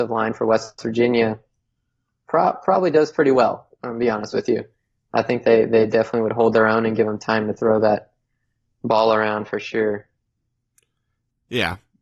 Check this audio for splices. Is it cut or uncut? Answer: uncut